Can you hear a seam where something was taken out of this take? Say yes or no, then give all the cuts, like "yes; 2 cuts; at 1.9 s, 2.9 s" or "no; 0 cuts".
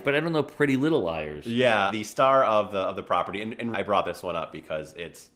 yes; 2 cuts; at 1.9 s, 3.7 s